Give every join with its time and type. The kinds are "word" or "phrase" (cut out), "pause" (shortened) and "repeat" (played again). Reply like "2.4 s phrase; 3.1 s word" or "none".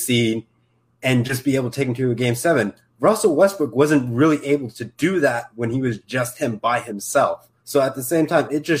7.6 s pause